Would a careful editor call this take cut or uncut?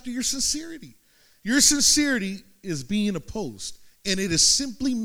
uncut